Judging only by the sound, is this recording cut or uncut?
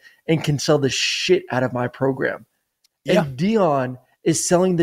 uncut